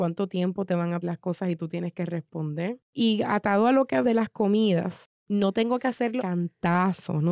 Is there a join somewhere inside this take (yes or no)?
yes